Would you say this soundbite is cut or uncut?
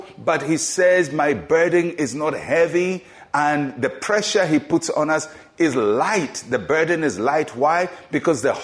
uncut